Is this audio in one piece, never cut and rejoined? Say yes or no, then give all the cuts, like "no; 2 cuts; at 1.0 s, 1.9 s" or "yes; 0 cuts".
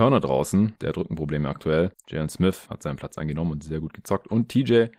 yes; 0 cuts